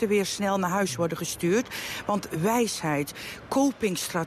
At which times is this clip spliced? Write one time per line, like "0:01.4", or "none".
none